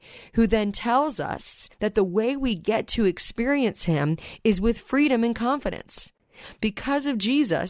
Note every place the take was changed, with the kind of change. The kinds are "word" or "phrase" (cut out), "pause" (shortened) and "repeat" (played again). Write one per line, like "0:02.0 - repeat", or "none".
0:01.7 - pause